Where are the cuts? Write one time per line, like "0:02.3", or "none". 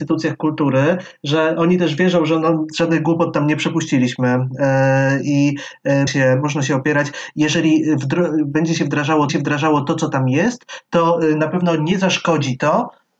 0:06.1
0:09.3